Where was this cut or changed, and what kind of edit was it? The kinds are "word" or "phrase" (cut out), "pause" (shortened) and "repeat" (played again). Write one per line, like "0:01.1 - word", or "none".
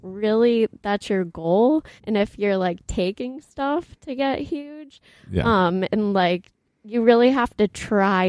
0:02.0 - pause